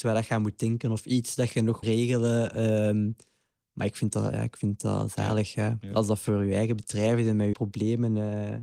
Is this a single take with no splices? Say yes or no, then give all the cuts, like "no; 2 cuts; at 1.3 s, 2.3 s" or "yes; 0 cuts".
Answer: no; 2 cuts; at 1.8 s, 7.5 s